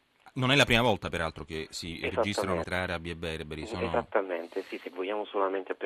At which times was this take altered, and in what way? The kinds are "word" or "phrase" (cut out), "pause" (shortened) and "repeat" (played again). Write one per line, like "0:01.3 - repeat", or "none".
0:02.6 - word